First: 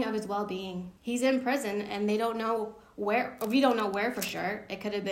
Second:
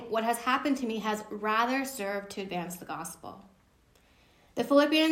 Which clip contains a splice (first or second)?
first